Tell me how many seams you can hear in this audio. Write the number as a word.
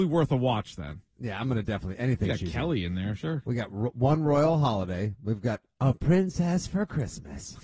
zero